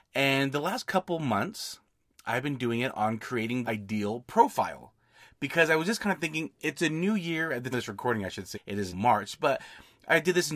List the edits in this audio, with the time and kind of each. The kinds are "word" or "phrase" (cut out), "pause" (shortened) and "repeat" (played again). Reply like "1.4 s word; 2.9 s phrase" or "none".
3.6 s word; 7.7 s word; 8.5 s word; 8.9 s word